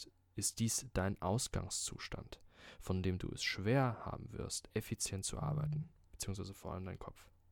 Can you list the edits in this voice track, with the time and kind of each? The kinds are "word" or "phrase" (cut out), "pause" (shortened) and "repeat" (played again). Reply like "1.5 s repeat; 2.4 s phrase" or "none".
none